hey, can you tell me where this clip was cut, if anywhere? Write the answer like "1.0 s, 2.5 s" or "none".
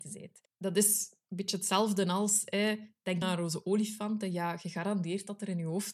3.2 s

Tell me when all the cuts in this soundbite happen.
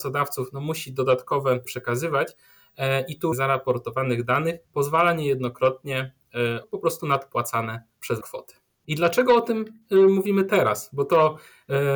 1.6 s, 3.3 s, 4.6 s, 6.6 s, 8.2 s

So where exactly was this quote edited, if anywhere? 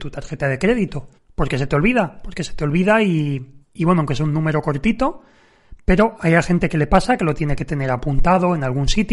1.2 s, 3.6 s

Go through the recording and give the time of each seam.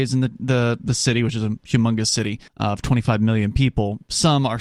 2.5 s

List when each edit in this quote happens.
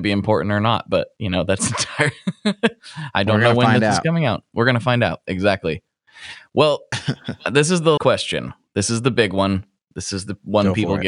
8.0 s

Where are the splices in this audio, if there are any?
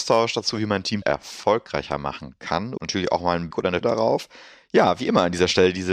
1.0 s, 2.8 s, 3.5 s, 3.8 s

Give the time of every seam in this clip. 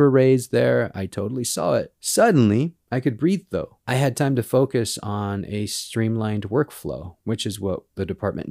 none

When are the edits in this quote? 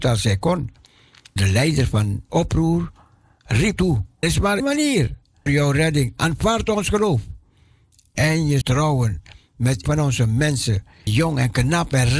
1.4 s, 2.3 s, 3.8 s, 4.2 s, 4.6 s, 5.5 s, 8.6 s, 9.8 s, 11.1 s

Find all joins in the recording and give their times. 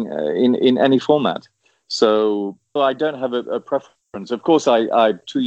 2.8 s

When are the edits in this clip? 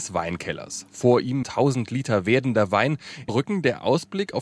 1.4 s, 3.3 s

